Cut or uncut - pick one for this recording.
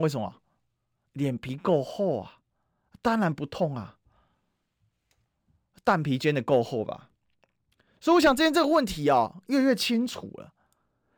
uncut